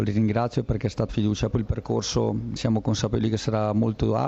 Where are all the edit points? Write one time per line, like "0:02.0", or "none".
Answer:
0:01.1
0:01.5
0:02.6